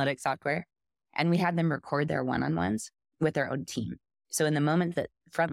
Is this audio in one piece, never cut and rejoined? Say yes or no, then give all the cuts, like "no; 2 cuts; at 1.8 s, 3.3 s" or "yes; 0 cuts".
yes; 0 cuts